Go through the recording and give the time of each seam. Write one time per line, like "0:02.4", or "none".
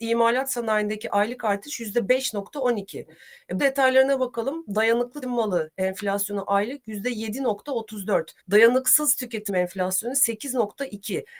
0:03.6
0:05.2
0:08.4
0:09.5